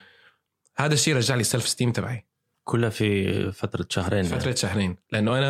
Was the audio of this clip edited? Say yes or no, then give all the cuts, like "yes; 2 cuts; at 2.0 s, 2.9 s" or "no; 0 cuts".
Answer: no; 0 cuts